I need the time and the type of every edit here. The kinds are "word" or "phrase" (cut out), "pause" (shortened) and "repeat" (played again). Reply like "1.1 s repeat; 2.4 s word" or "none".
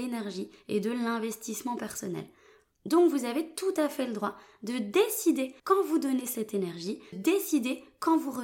5.6 s pause; 7.1 s word